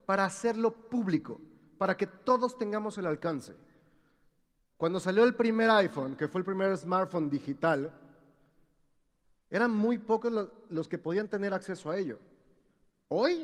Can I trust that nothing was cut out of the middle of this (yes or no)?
yes